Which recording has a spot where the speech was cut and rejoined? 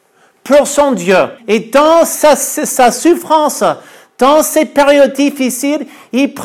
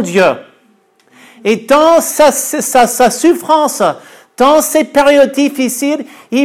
first; 2 cuts; at 1.4 s, 2.9 s

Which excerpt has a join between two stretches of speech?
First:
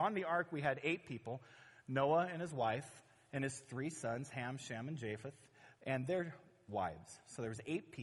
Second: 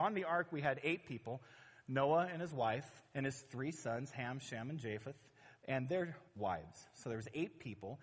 second; 2 cuts; at 3.1 s, 6.3 s

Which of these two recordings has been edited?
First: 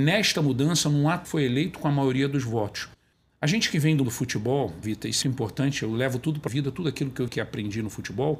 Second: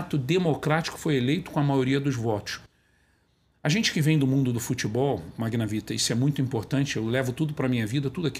first; 7 cuts; at 1.2 s, 3.1 s, 4.0 s, 4.8 s, 5.2 s, 6.5 s, 7.3 s

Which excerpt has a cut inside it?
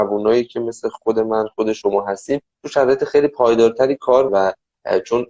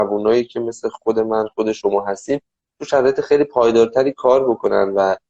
first; 2 cuts; at 2.5 s, 4.3 s

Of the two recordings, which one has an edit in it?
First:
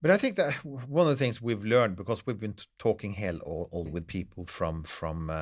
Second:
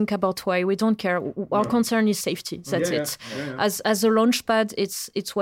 first; 1 cut; at 3.9 s

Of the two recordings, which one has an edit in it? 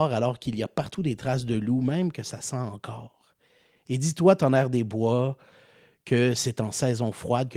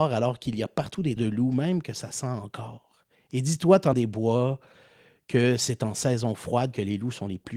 second; 3 cuts; at 1.2 s, 3.2 s, 3.9 s

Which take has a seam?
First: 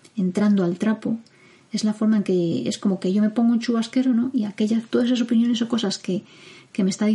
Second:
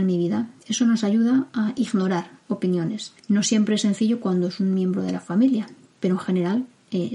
second; 1 cut; at 3.2 s

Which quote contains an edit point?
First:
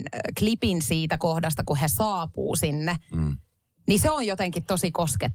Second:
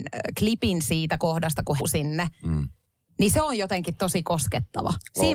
second; 1 cut; at 1.8 s

